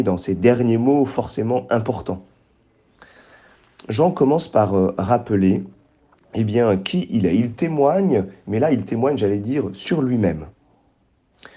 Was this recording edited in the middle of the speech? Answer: no; 0 cuts

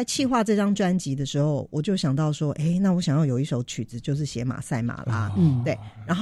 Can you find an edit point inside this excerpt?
no; 0 cuts

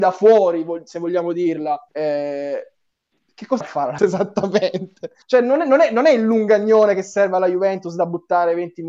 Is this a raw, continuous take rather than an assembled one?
no; 4 cuts; at 1.9 s, 3.6 s, 4.0 s, 5.2 s

